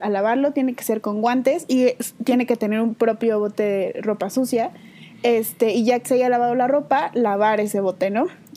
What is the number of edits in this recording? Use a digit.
1